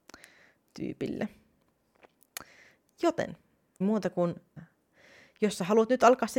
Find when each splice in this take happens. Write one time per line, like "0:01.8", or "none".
0:03.8
0:04.6